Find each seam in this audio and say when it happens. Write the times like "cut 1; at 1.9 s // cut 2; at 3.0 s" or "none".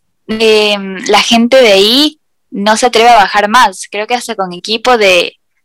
none